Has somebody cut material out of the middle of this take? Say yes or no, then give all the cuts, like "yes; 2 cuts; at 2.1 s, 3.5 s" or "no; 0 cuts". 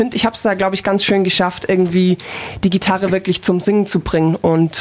no; 0 cuts